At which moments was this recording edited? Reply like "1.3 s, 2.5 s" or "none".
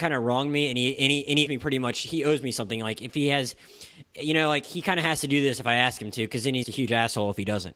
1.5 s, 6.6 s